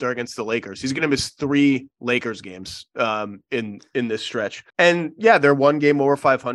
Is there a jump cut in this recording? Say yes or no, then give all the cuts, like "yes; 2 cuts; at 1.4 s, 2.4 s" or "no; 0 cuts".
yes; 1 cut; at 4.7 s